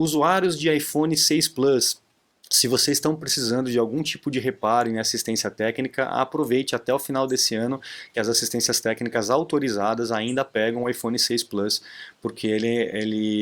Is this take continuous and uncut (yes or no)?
yes